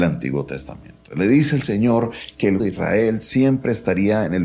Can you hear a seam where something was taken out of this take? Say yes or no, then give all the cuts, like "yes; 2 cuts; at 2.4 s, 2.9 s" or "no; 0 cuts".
yes; 1 cut; at 2.6 s